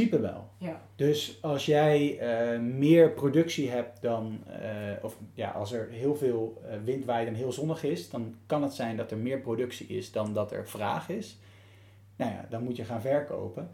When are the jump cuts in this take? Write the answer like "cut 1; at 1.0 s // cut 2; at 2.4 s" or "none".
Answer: none